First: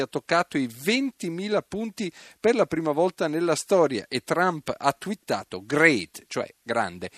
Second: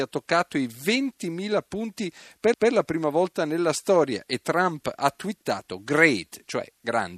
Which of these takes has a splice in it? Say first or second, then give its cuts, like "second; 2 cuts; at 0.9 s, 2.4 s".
second; 1 cut; at 2.5 s